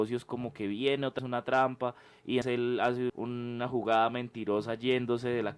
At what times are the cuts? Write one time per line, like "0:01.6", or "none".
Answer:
0:01.2
0:02.4
0:03.1